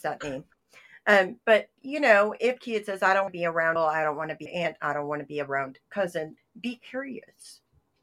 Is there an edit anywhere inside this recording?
yes; 6 cuts; at 1.8 s, 2.6 s, 3.3 s, 3.8 s, 4.5 s, 6.4 s

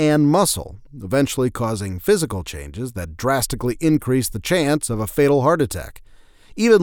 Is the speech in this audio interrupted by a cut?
no; 0 cuts

